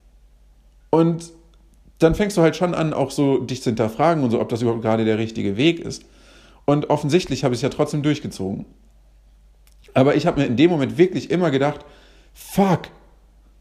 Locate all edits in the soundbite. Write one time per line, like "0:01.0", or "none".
none